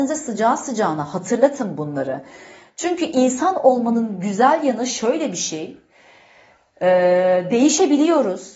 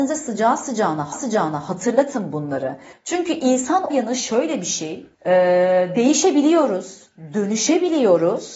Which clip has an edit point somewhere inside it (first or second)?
second